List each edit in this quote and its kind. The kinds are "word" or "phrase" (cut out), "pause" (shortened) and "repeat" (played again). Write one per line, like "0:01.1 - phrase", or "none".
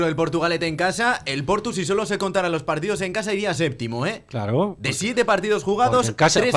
none